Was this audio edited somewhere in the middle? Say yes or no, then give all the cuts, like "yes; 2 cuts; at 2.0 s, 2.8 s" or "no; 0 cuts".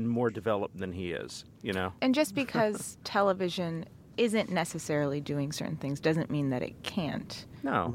no; 0 cuts